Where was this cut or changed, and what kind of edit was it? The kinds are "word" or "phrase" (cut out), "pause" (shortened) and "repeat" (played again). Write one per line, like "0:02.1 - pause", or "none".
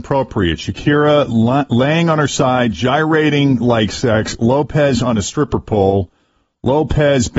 none

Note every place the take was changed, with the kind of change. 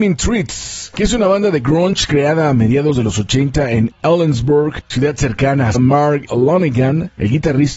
0:05.7 - phrase

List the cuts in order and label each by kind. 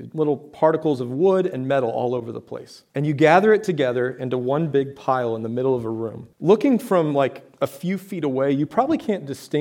0:02.9 - pause
0:06.3 - pause

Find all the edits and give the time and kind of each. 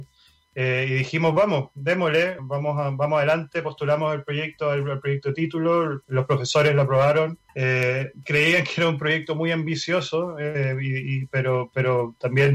0:02.4 - word
0:06.0 - pause
0:07.5 - pause

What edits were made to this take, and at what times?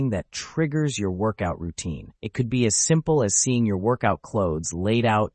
0:02.2 - pause

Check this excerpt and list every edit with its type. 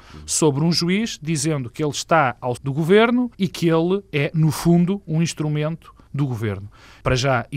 0:02.6 - word
0:03.3 - pause

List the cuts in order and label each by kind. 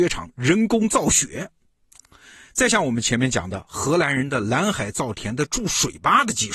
none

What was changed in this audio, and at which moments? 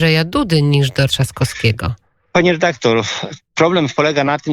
0:01.1 - word

